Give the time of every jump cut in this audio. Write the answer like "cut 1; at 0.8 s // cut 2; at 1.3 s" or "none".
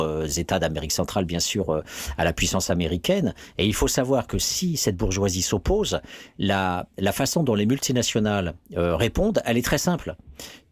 none